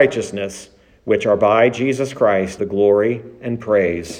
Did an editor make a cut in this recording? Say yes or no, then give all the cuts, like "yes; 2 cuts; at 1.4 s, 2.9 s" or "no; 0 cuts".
yes; 1 cut; at 2.6 s